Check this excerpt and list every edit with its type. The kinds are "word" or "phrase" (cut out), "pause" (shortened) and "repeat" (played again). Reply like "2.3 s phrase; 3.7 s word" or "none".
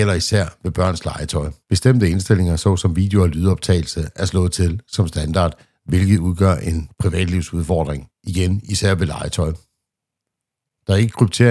1.6 s pause; 8.2 s pause